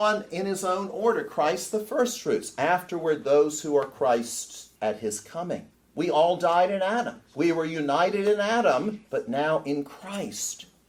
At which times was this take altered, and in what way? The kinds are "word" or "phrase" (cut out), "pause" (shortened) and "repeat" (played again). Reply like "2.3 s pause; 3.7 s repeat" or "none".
4.8 s pause; 5.7 s pause; 9.1 s pause